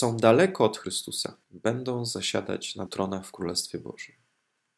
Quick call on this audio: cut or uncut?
cut